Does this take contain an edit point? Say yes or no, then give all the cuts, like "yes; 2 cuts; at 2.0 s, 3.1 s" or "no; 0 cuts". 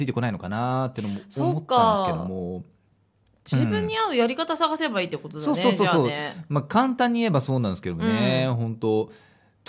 no; 0 cuts